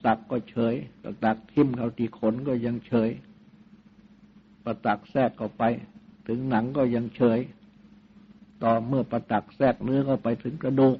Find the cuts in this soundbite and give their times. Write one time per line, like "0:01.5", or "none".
0:01.0
0:06.1
0:08.5